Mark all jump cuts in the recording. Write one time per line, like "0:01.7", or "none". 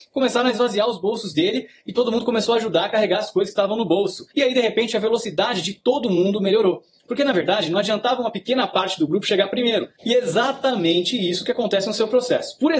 0:04.3